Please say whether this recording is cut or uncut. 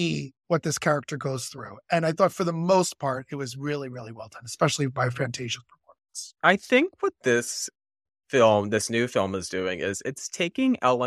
cut